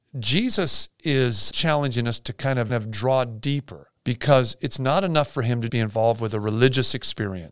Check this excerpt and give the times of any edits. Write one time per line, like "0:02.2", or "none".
0:01.5
0:02.7
0:04.0
0:05.7